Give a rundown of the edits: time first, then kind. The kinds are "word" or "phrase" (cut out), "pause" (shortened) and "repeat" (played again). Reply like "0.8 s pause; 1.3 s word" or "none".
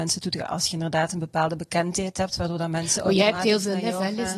none